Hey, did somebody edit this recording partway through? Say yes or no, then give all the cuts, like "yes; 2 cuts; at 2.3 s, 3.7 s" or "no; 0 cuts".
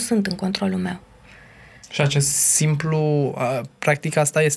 no; 0 cuts